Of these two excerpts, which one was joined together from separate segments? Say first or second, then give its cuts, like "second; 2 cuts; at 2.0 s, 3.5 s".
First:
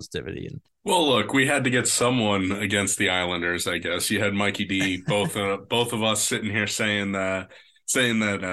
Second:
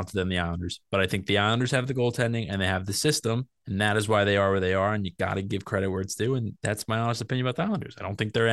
second; 1 cut; at 3.6 s